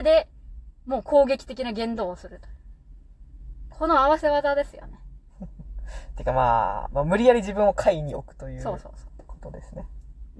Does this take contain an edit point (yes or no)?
no